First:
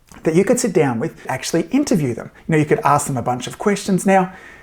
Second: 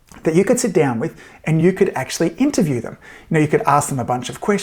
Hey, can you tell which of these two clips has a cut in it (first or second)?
first